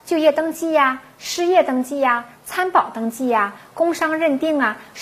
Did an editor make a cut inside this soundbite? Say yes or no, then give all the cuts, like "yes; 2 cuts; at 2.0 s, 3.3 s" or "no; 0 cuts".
no; 0 cuts